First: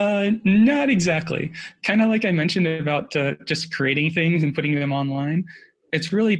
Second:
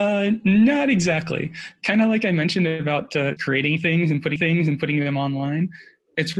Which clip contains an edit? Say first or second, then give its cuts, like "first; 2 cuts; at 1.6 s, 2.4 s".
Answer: second; 2 cuts; at 3.4 s, 4.4 s